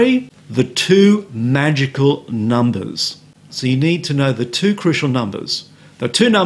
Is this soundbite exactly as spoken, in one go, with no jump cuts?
no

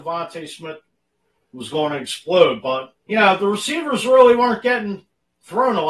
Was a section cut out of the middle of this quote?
yes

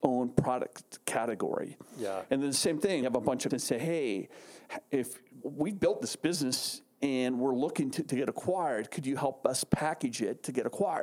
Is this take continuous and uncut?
no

